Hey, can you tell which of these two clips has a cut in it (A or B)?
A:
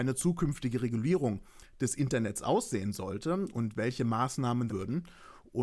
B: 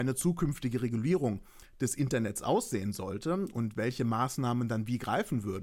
A